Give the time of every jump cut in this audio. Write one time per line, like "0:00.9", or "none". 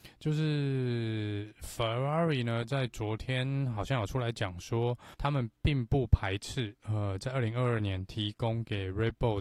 0:05.1
0:06.8